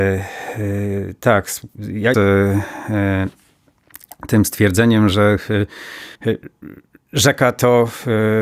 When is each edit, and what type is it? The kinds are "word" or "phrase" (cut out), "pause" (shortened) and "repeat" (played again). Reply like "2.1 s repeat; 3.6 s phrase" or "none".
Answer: 2.1 s phrase; 6.1 s pause